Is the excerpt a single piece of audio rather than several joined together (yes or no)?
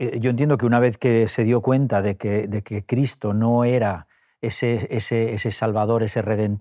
yes